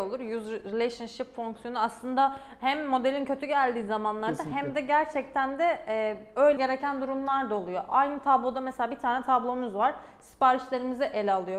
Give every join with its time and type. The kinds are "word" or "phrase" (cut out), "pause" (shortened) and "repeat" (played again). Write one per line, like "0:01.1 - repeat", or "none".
0:06.6 - word